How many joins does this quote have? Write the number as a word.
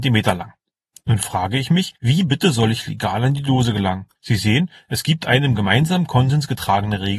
two